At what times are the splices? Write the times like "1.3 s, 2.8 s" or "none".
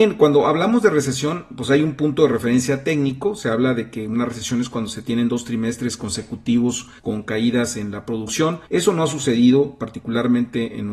7.0 s, 8.7 s